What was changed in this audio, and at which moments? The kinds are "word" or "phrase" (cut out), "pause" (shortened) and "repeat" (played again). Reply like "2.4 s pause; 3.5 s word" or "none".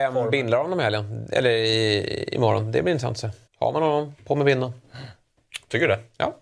3.5 s pause